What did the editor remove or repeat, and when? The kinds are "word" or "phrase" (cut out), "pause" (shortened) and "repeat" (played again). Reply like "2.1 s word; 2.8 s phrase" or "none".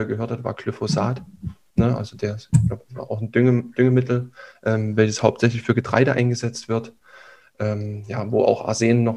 none